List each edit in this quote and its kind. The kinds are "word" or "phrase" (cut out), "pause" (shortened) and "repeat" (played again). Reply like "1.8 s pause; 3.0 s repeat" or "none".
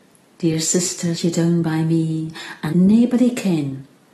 1.2 s word; 2.7 s word